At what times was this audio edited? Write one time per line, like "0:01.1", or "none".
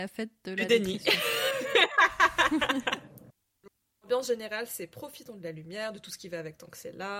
none